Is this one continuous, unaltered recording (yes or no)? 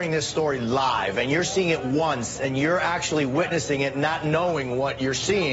yes